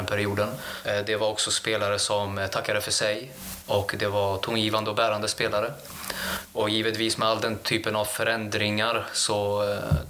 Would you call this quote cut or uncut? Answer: uncut